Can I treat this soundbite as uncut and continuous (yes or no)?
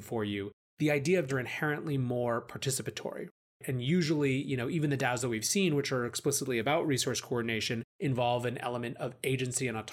no